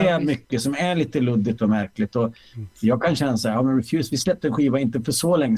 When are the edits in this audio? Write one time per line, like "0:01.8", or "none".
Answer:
none